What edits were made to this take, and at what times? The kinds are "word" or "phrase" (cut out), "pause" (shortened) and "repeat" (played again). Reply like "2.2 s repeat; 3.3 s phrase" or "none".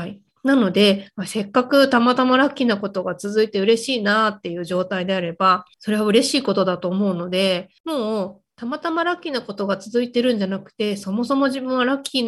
5.7 s pause; 7.8 s pause